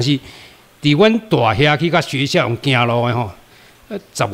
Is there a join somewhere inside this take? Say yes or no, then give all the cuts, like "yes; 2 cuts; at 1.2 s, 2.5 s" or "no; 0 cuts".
no; 0 cuts